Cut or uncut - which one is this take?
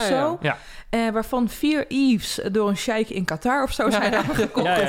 uncut